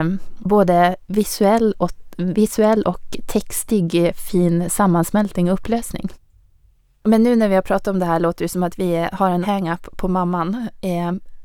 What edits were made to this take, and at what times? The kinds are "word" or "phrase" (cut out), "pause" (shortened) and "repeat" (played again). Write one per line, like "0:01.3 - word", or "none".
0:09.4 - word